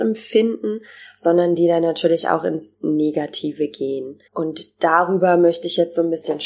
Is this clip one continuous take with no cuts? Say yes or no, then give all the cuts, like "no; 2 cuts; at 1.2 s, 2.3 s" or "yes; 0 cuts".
no; 1 cut; at 4.3 s